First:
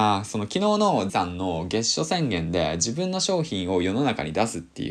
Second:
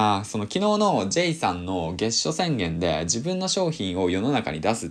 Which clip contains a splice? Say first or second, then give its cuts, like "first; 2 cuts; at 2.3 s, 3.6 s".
first; 1 cut; at 1.1 s